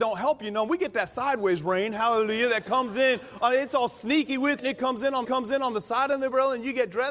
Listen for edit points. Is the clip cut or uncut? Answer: cut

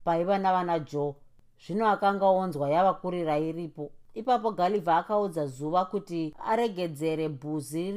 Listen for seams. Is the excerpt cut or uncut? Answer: uncut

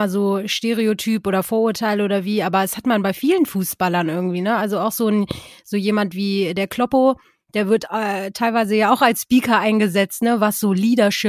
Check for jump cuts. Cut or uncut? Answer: uncut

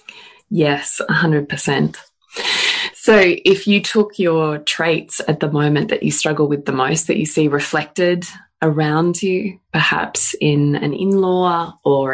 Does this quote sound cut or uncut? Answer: uncut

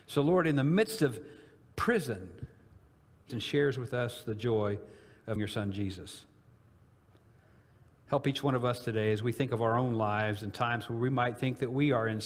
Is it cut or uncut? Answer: cut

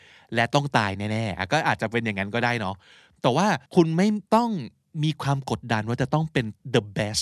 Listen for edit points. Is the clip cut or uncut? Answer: cut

